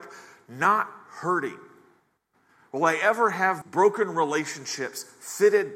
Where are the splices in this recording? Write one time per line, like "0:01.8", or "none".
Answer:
0:02.2
0:03.6